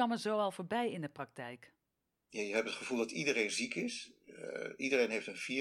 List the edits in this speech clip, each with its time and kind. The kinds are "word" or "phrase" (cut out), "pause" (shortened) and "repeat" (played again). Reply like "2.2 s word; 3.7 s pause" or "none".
none